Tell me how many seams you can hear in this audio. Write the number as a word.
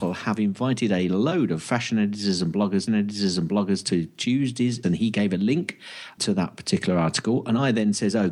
three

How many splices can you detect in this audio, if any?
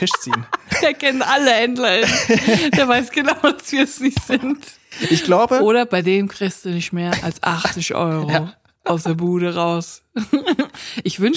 zero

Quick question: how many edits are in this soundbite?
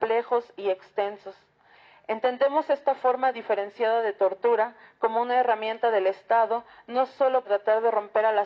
one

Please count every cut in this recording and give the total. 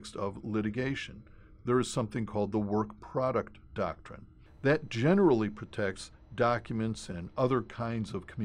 zero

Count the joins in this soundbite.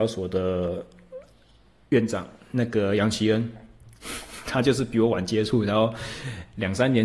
zero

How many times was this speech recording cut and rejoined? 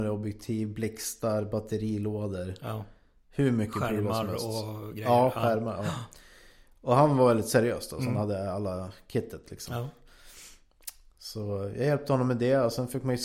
zero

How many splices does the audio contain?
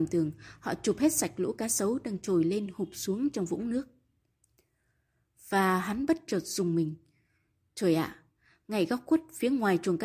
zero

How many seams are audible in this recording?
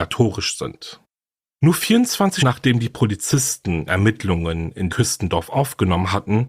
three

